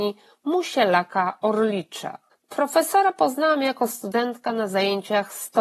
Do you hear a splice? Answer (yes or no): yes